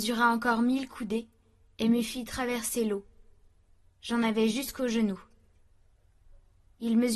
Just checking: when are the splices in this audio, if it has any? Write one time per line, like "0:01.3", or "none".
none